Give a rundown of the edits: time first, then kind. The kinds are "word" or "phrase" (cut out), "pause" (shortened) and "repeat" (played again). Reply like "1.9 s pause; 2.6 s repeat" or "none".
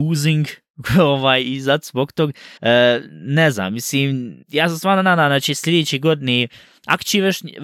2.6 s pause; 4.4 s pause